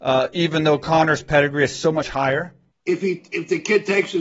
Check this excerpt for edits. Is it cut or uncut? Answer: uncut